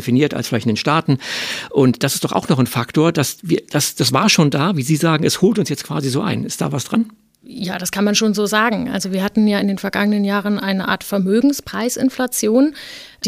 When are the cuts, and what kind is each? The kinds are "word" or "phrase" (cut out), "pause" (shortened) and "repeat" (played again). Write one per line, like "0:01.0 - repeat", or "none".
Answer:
none